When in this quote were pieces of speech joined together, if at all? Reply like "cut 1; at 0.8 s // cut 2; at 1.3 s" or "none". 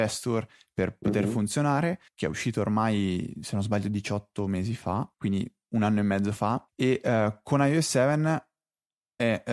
cut 1; at 2.1 s // cut 2; at 5.1 s // cut 3; at 6.7 s